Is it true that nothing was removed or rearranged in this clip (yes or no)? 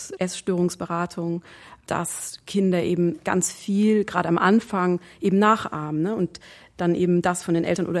yes